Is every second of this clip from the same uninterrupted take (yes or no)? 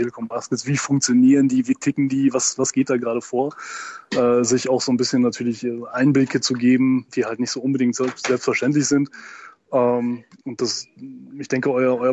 no